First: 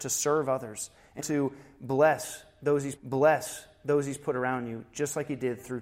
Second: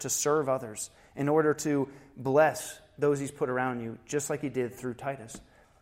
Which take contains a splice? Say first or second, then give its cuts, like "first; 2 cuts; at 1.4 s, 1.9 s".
first; 2 cuts; at 1.2 s, 3.0 s